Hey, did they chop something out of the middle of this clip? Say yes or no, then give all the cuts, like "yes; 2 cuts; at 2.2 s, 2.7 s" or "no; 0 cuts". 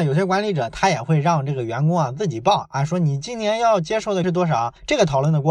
yes; 1 cut; at 4.2 s